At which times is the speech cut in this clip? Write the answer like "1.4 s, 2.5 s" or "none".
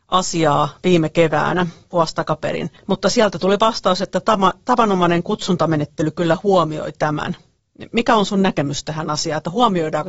2.8 s